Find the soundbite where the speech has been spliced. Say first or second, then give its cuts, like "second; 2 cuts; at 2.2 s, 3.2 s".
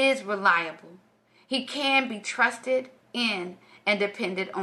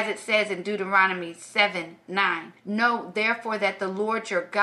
second; 1 cut; at 2.6 s